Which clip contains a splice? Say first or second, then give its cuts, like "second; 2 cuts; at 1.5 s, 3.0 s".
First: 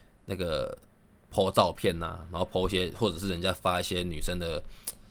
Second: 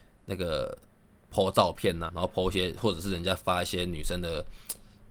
second; 1 cut; at 2.1 s